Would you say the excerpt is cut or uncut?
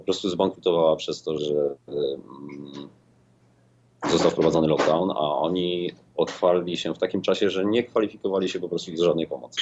cut